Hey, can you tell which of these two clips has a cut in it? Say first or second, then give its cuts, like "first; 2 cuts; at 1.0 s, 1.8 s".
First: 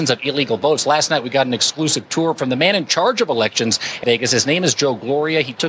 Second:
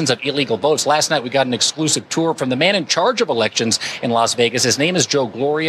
first; 1 cut; at 4.0 s